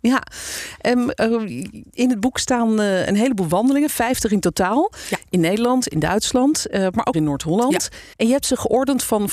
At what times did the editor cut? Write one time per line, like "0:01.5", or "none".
0:07.1
0:08.1